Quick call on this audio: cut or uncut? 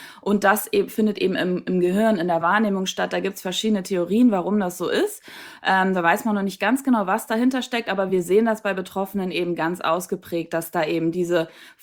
uncut